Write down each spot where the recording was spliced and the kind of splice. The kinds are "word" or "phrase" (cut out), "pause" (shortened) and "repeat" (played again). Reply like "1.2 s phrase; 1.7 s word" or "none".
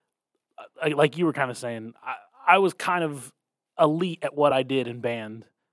none